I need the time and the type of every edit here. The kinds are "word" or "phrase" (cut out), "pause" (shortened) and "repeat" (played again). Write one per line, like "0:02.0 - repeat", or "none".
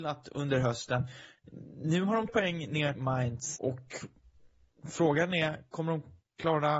0:02.3 - word
0:03.0 - word
0:03.6 - word